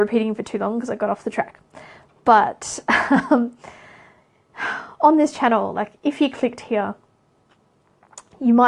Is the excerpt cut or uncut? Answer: uncut